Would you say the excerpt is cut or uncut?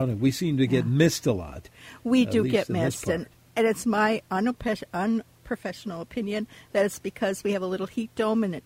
uncut